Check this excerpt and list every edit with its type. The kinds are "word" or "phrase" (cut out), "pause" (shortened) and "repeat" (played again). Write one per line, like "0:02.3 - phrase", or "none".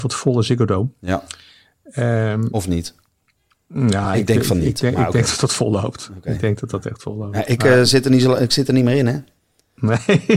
none